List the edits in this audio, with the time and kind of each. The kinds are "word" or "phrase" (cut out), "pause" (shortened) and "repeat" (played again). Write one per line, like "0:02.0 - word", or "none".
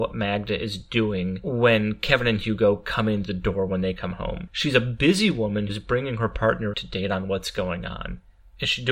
0:03.3 - word
0:05.7 - word
0:06.7 - word